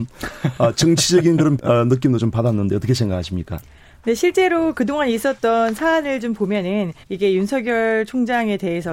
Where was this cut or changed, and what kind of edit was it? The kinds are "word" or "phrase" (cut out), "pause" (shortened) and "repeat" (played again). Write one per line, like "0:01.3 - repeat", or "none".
0:01.6 - word
0:07.0 - pause

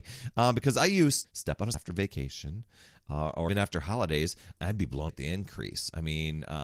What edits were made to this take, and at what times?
0:01.2 - word
0:01.7 - word
0:03.5 - word
0:04.6 - word
0:05.1 - word

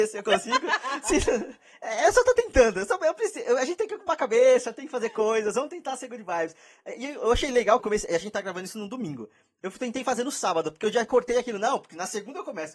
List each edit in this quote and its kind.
0:07.8 - word

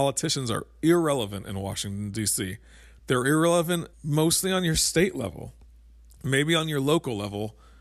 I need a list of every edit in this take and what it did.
0:03.9 - pause

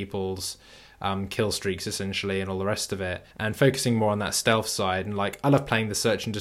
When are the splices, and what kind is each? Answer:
0:03.3 - pause

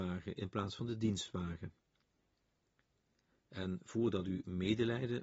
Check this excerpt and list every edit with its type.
none

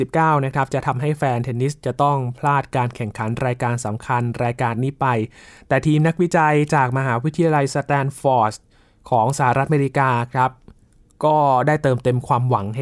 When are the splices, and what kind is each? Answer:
none

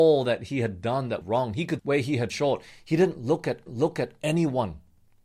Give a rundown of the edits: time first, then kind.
0:01.2 - word
0:01.8 - word
0:02.3 - word
0:03.7 - repeat

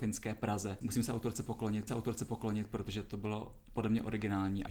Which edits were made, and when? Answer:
0:01.9 - repeat

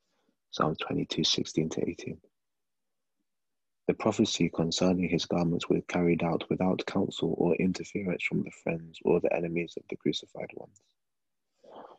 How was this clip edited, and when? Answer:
none

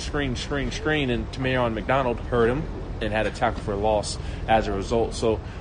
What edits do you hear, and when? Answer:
none

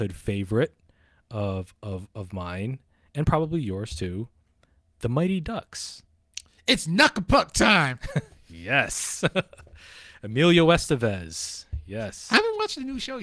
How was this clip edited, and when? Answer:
none

